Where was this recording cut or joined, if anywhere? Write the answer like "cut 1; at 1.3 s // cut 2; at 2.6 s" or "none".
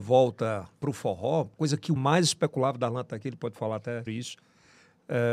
cut 1; at 1.5 s // cut 2; at 2.0 s // cut 3; at 4.1 s